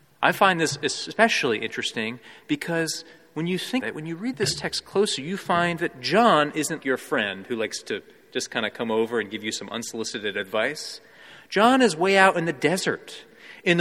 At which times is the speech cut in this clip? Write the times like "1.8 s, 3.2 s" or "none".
3.8 s, 6.8 s